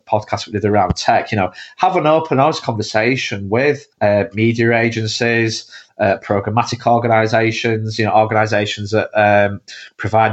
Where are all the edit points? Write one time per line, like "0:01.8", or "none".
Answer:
0:03.9

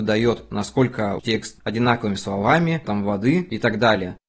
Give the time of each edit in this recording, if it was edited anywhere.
0:01.2
0:01.6
0:02.8

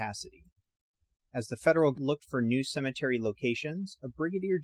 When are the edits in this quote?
0:01.9

